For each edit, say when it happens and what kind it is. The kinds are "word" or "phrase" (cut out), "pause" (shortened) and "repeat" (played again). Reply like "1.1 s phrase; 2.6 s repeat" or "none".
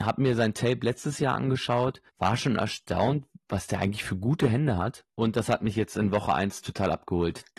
2.1 s pause; 5.1 s pause